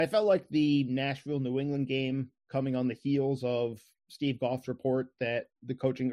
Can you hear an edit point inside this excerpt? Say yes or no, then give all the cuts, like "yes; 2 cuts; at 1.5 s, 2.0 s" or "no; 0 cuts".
no; 0 cuts